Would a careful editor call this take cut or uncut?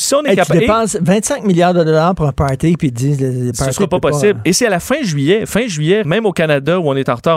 cut